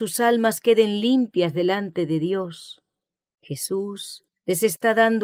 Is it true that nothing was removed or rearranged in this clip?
yes; 0 cuts

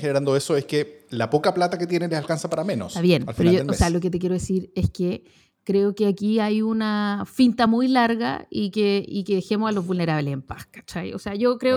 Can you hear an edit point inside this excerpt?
no; 0 cuts

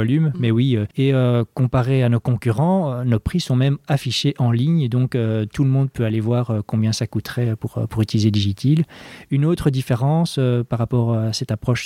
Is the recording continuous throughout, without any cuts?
no; 1 cut; at 0.9 s

